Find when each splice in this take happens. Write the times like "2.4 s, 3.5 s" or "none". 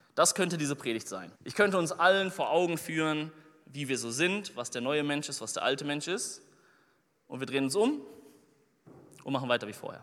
1.4 s